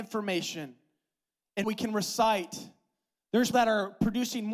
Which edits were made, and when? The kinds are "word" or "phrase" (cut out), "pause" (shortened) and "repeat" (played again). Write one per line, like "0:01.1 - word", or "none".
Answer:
0:01.6 - word
0:03.5 - word